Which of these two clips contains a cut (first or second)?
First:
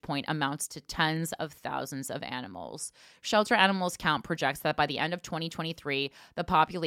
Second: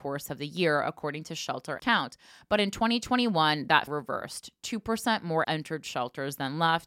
second